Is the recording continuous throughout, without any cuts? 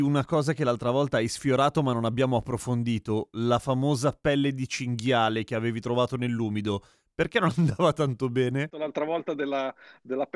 yes; 0 cuts

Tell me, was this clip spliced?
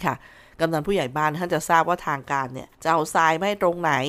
yes; 1 cut; at 2.7 s

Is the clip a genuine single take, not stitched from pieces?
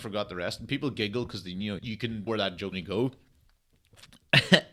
no; 3 cuts; at 1.8 s, 2.3 s, 2.7 s

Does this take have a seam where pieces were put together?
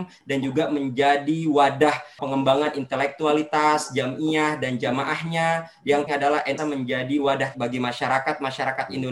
yes; 4 cuts; at 2.2 s, 6.1 s, 6.6 s, 7.5 s

